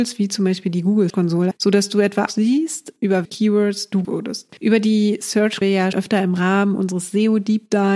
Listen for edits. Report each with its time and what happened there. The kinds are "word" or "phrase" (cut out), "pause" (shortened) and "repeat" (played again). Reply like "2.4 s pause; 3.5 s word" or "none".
1.1 s word; 1.5 s word; 2.3 s word; 3.2 s word; 4.0 s word; 4.6 s pause; 5.6 s phrase; 5.9 s word